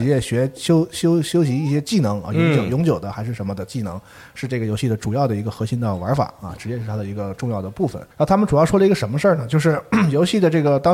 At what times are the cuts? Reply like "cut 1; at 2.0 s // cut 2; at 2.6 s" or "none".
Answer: cut 1; at 8.1 s